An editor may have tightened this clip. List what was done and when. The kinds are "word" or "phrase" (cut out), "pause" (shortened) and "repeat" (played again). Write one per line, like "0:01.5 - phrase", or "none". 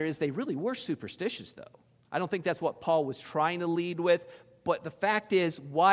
none